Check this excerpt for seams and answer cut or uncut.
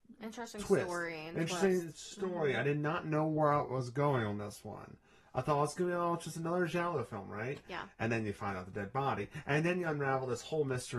uncut